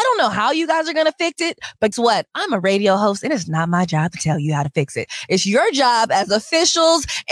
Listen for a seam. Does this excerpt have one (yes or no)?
yes